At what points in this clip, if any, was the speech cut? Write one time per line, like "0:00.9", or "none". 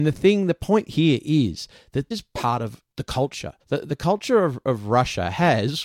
0:02.1
0:02.9
0:03.6